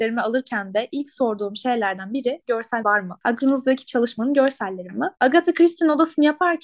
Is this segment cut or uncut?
cut